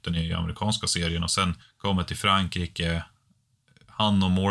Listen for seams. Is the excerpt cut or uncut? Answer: cut